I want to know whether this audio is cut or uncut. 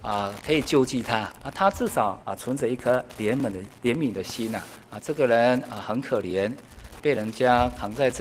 cut